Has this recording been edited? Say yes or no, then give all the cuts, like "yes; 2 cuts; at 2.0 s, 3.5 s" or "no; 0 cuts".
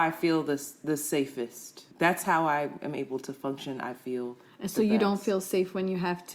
yes; 1 cut; at 1.9 s